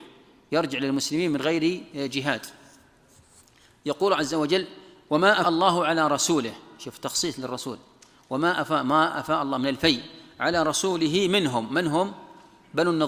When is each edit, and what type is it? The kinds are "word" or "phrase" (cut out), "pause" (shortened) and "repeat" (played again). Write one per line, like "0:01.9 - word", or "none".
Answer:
0:05.4 - word